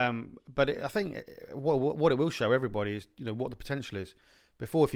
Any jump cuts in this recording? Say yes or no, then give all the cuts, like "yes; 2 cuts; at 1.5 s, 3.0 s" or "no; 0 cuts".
no; 0 cuts